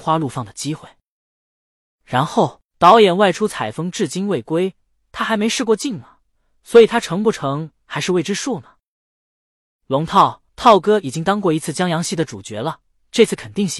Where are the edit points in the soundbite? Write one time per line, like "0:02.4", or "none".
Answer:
0:10.5